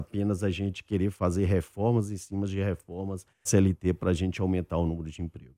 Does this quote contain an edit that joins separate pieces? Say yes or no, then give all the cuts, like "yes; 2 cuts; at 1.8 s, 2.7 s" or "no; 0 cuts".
yes; 1 cut; at 3.5 s